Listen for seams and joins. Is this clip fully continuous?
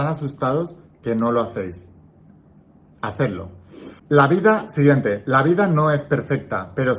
no; 1 cut; at 4.0 s

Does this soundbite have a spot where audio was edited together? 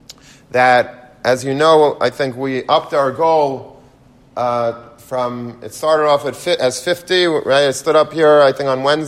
no; 0 cuts

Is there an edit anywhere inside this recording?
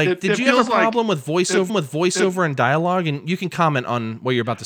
yes; 1 cut; at 1.7 s

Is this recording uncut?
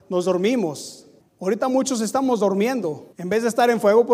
no; 2 cuts; at 1.2 s, 3.1 s

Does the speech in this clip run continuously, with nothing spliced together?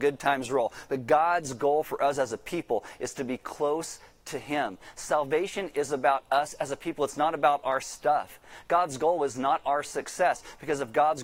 yes; 0 cuts

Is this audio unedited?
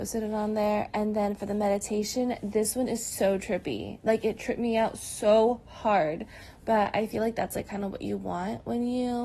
yes; 0 cuts

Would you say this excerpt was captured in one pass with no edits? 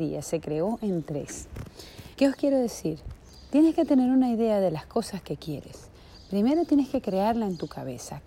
no; 1 cut; at 2.1 s

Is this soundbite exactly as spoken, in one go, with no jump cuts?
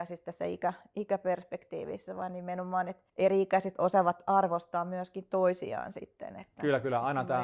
no; 1 cut; at 3.1 s

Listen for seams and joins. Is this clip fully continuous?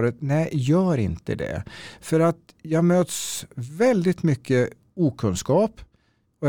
yes; 0 cuts

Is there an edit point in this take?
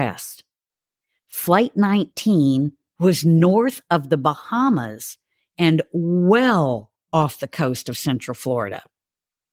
no; 0 cuts

